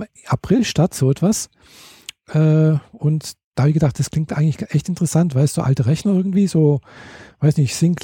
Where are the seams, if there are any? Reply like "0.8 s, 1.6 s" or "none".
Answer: none